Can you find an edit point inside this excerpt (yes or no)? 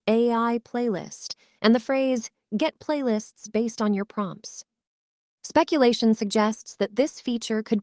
no